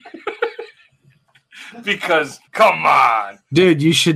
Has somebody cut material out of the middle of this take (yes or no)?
yes